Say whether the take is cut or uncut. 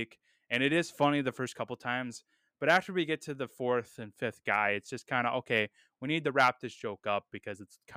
uncut